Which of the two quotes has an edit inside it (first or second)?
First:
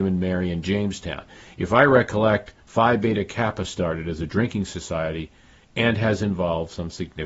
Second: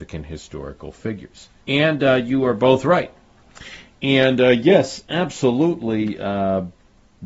second